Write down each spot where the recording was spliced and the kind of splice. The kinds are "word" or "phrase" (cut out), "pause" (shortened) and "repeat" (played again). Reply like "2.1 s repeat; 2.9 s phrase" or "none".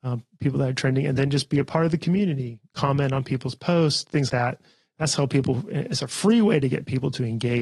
4.3 s word